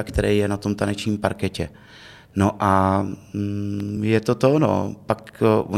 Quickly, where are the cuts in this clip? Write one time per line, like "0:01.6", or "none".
none